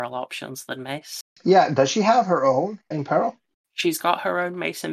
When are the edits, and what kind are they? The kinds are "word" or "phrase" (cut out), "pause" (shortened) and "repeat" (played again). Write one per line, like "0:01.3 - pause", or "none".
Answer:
0:02.9 - word